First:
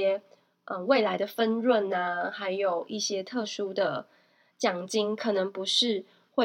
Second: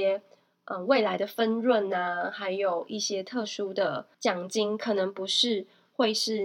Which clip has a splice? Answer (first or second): second